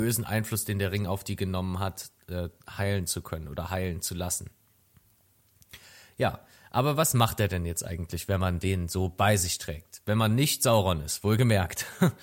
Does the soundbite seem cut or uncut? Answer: uncut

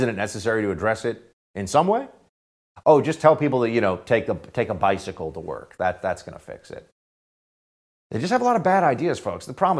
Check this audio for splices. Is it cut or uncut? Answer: uncut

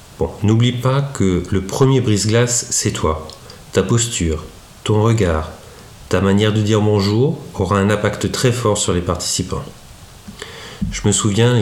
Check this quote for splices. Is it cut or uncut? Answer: uncut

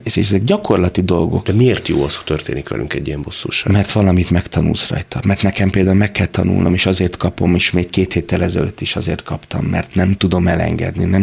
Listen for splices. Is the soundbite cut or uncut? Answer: uncut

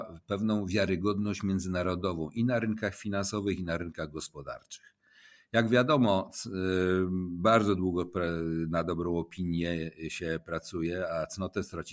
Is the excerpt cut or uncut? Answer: uncut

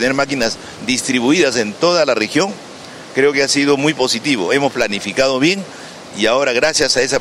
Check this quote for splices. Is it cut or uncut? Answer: uncut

